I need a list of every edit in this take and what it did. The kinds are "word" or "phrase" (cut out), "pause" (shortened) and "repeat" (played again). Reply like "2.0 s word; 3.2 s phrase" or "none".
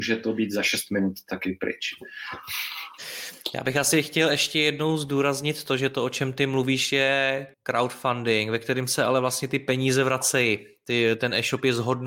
7.5 s pause